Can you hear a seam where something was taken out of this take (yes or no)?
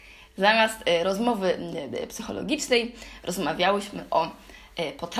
no